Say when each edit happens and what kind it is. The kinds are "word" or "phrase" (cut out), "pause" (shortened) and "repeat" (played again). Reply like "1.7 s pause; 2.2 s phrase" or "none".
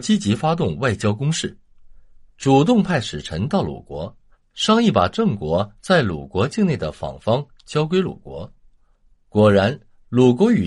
none